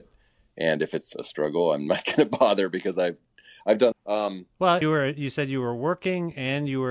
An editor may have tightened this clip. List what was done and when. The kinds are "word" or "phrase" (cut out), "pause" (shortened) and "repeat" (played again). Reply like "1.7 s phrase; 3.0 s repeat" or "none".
3.9 s word; 4.8 s phrase